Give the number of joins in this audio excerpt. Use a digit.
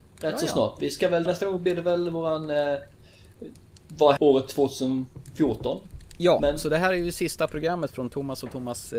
2